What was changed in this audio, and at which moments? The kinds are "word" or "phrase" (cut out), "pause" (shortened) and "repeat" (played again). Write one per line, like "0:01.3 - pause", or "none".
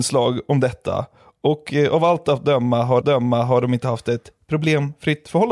0:03.0 - repeat